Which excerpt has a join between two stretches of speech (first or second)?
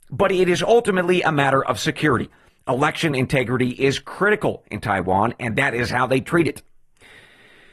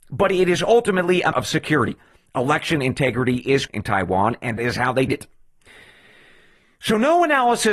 second